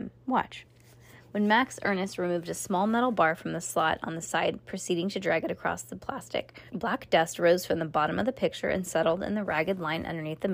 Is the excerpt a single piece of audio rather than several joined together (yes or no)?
no